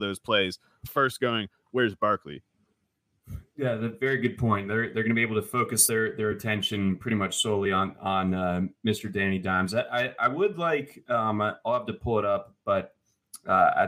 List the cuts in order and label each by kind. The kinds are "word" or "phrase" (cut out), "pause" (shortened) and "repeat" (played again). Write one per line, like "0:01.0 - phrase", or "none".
none